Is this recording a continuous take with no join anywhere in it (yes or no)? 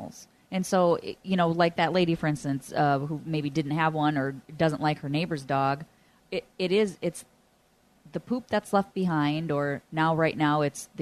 yes